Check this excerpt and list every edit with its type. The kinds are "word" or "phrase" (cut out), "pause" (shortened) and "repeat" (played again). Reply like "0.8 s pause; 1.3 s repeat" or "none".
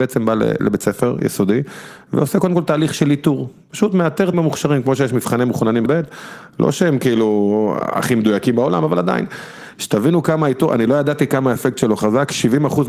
4.3 s word; 5.9 s word